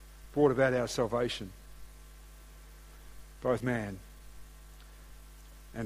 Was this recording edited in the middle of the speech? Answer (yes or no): yes